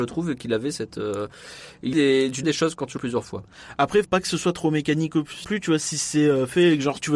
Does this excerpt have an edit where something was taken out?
yes; 5 cuts; at 1.9 s, 2.4 s, 3.0 s, 4.0 s, 5.4 s

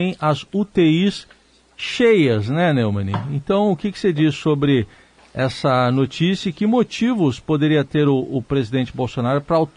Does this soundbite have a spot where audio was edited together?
no; 0 cuts

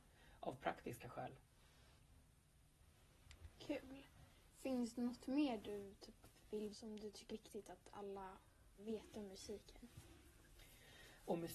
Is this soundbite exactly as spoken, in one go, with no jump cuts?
no; 3 cuts; at 6.7 s, 7.3 s, 8.8 s

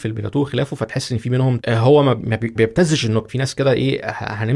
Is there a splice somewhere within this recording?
yes; 3 cuts; at 1.6 s, 2.6 s, 3.3 s

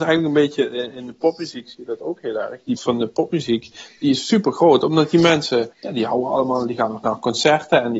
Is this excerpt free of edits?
no; 2 cuts; at 2.8 s, 5.7 s

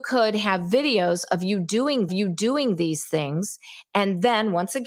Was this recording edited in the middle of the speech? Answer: yes; 1 cut; at 2.1 s

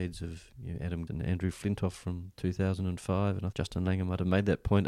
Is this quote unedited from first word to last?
no; 2 cuts; at 1.1 s, 3.5 s

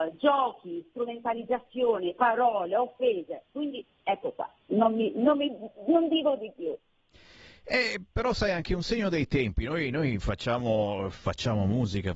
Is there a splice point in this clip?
no; 0 cuts

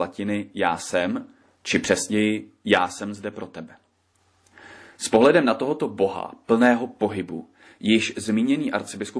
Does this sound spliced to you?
no; 0 cuts

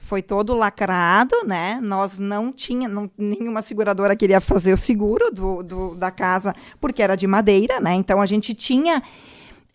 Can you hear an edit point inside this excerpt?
no; 0 cuts

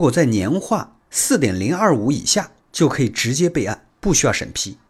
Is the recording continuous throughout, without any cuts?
yes; 0 cuts

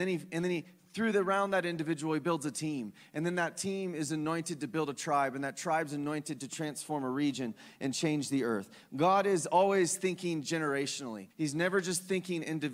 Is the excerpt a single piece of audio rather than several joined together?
no; 1 cut; at 11.3 s

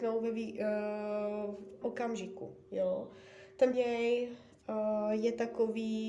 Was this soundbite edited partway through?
yes; 2 cuts; at 1.8 s, 3.7 s

